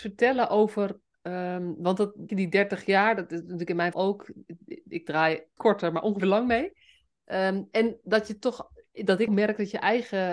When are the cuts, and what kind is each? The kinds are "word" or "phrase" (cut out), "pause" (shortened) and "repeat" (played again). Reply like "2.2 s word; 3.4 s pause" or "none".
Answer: 2.3 s word; 3.9 s word; 5.6 s word; 6.2 s word; 9.3 s word